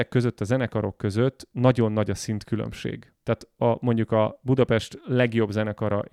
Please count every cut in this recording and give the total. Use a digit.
1